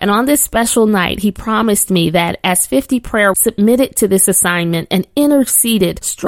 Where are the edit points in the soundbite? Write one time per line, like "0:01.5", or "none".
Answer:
0:03.3